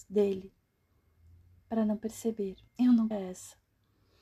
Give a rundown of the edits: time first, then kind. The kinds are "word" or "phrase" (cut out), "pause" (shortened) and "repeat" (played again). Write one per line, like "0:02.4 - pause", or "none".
0:02.7 - pause
0:03.1 - word

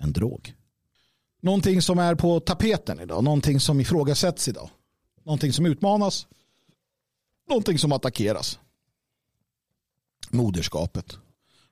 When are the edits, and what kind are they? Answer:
none

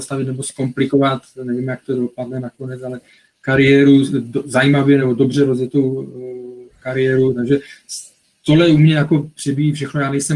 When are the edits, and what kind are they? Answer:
none

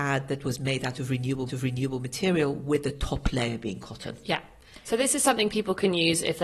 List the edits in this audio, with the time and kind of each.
0:01.5 - repeat

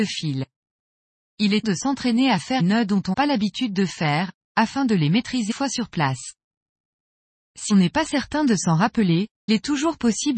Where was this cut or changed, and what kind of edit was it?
0:01.6 - word
0:02.6 - word
0:03.1 - word
0:05.5 - word
0:07.7 - word
0:09.5 - word

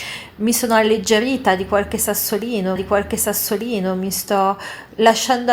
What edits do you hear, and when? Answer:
0:02.8 - repeat

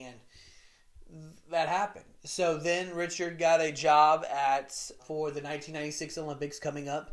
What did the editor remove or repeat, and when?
0:05.0 - word

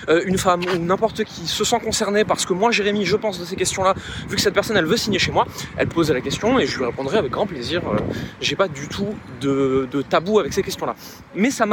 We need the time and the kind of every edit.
0:01.3 - word
0:05.9 - phrase
0:09.9 - word

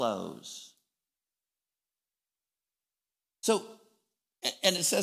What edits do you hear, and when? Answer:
none

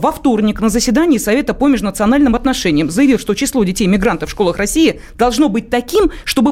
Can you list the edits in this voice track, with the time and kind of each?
none

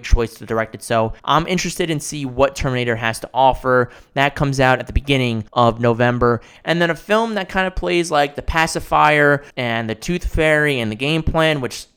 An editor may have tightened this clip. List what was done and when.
0:01.2 - pause
0:05.5 - pause
0:09.5 - pause

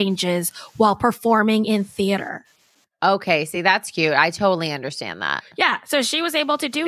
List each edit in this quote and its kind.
none

